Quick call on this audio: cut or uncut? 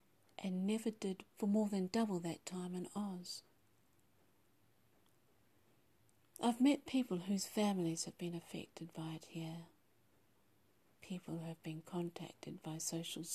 cut